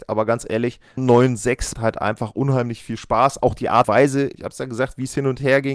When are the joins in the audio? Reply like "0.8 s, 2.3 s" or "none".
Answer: 1.0 s, 1.7 s, 3.8 s, 4.3 s